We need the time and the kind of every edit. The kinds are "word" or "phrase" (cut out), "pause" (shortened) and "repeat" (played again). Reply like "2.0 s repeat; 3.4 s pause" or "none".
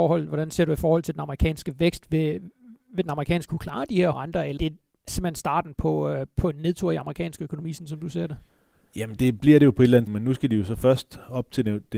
3.5 s word; 4.1 s word; 4.6 s word; 5.1 s word; 9.2 s word; 10.1 s word